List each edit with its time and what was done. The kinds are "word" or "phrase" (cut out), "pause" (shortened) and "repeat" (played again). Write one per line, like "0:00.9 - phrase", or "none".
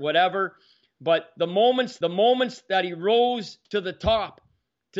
0:02.0 - repeat
0:03.6 - pause